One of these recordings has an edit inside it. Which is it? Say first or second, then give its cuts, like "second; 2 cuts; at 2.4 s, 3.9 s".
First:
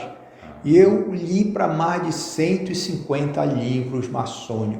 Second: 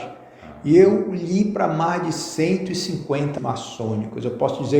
second; 1 cut; at 3.4 s